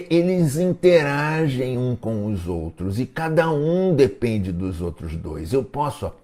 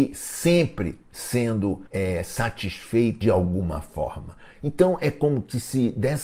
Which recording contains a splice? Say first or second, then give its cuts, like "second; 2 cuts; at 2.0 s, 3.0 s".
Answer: second; 2 cuts; at 1.9 s, 3.2 s